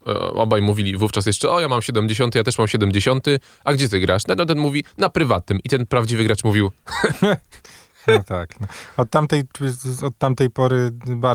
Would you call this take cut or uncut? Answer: uncut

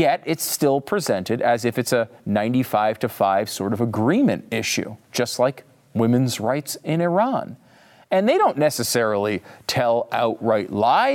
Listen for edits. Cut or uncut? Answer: uncut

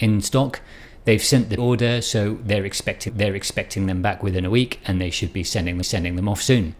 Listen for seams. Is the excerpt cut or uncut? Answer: cut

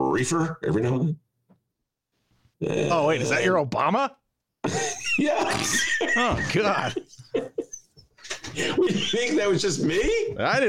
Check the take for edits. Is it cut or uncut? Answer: uncut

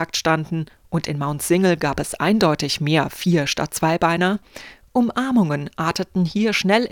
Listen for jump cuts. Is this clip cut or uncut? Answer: uncut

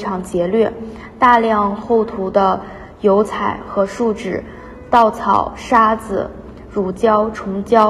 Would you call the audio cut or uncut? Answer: uncut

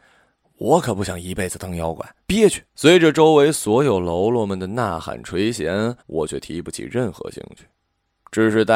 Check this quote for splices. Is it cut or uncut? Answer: cut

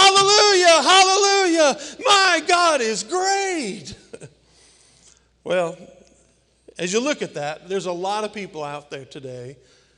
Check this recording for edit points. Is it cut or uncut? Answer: uncut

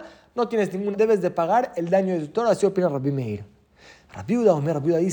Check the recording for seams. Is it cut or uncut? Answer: cut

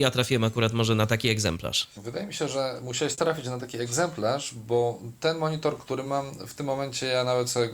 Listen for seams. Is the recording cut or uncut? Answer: uncut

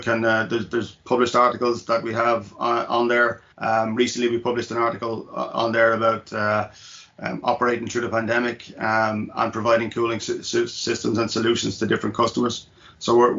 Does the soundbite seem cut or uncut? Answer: cut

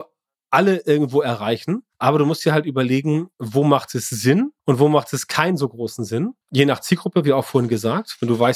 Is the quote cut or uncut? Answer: cut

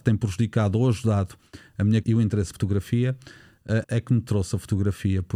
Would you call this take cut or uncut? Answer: cut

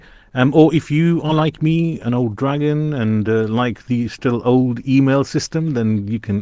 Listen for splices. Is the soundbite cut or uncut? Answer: uncut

